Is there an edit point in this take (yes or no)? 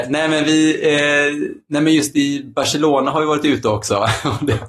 no